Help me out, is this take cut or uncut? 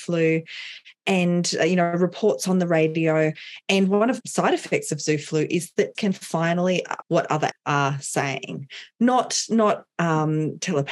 cut